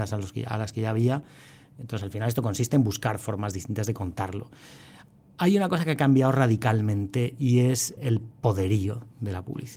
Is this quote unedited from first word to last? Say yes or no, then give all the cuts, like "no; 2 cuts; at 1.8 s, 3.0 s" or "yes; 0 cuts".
no; 1 cut; at 8.0 s